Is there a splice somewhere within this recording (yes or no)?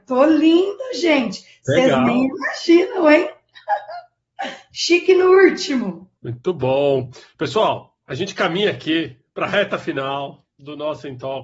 yes